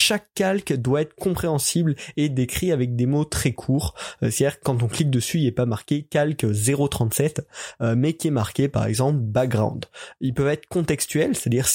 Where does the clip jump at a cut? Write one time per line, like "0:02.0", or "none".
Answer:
none